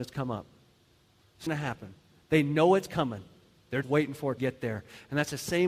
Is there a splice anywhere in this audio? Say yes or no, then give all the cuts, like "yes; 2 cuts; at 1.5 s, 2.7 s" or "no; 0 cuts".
yes; 3 cuts; at 1.5 s, 3.8 s, 4.4 s